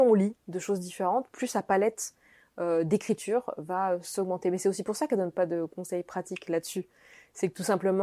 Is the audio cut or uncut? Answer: uncut